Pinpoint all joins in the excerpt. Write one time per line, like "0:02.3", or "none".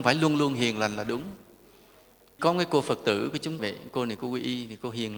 0:02.4
0:03.6

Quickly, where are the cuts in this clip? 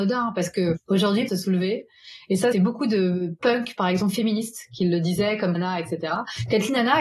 0:01.3
0:02.5
0:03.4
0:05.5

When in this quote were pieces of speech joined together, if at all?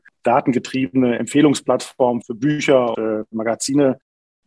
0:02.2
0:02.9

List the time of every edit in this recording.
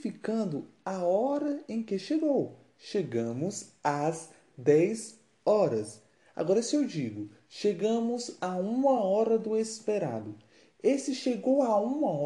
none

